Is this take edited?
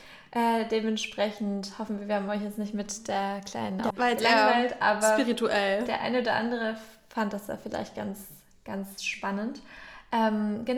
yes; 1 cut; at 3.9 s

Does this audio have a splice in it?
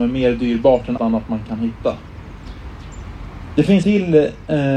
yes; 2 cuts; at 1.0 s, 3.8 s

